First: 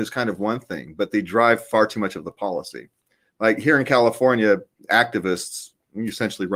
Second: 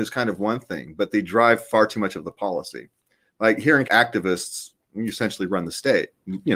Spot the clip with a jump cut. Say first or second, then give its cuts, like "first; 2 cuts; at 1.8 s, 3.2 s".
second; 1 cut; at 3.8 s